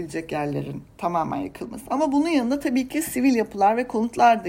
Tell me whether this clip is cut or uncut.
uncut